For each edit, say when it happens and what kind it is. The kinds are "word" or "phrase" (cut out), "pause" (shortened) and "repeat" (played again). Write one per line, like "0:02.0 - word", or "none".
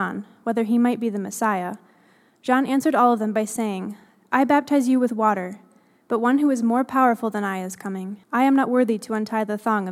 0:08.2 - pause